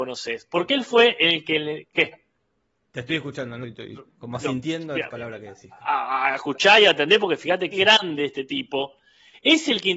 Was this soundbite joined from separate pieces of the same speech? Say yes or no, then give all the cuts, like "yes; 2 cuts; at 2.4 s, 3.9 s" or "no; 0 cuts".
yes; 3 cuts; at 3.6 s, 5.1 s, 7.7 s